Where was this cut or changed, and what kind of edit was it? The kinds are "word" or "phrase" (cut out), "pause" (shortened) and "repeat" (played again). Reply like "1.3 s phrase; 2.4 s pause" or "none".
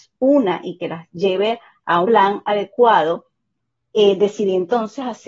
2.0 s word